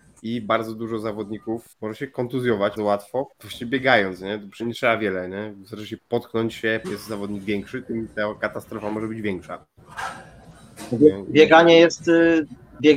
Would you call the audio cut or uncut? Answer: cut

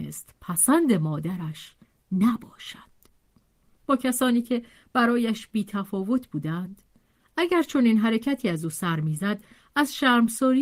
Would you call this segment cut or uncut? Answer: uncut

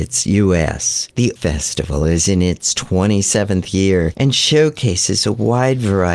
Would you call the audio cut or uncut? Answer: cut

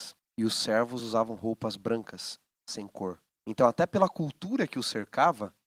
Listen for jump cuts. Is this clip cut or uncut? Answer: uncut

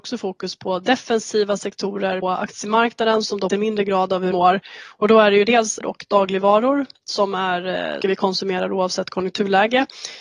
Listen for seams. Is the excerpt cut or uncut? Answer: cut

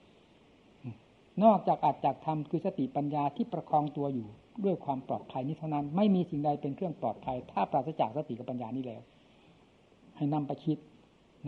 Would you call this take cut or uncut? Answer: uncut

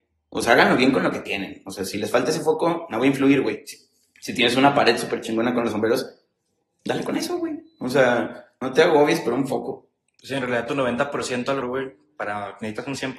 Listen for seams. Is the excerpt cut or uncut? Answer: cut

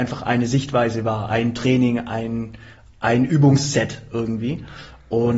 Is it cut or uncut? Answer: uncut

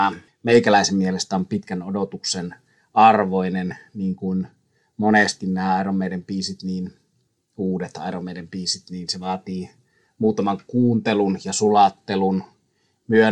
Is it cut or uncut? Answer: uncut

